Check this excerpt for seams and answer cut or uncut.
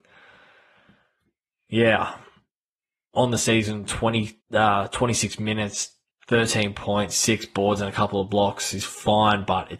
cut